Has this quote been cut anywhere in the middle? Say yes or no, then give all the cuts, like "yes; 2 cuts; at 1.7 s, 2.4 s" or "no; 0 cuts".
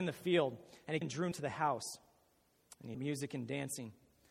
yes; 3 cuts; at 1.0 s, 1.3 s, 2.9 s